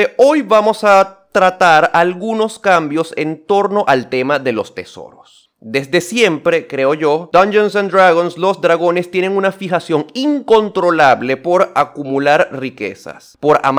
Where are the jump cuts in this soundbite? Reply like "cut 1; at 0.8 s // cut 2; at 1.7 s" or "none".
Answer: cut 1; at 7.3 s